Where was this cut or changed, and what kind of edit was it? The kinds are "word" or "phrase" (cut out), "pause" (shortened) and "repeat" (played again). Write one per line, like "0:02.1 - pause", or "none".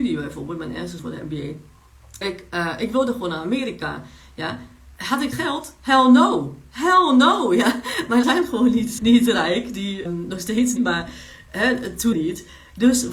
0:01.0 - word
0:02.2 - word
0:05.3 - word
0:08.2 - word
0:09.0 - word
0:10.1 - word
0:10.8 - word
0:12.1 - word